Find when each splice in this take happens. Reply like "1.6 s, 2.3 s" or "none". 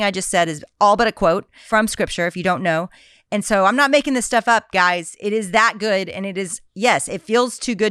none